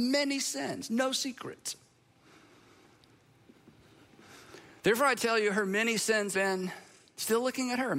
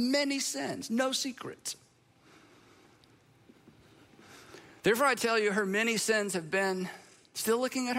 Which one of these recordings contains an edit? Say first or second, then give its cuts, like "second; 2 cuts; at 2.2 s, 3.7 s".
first; 1 cut; at 6.3 s